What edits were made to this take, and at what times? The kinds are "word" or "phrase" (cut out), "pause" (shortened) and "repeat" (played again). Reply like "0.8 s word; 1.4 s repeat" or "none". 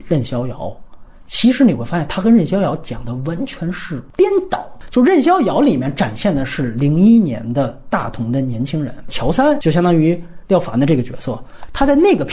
none